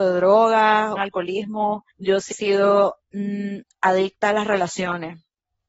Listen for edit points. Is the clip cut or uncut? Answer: cut